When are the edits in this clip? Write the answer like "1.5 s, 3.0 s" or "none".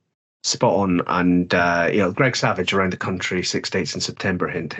none